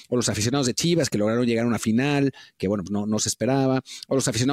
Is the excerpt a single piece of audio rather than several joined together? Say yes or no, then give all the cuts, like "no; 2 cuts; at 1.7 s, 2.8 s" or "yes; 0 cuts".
yes; 0 cuts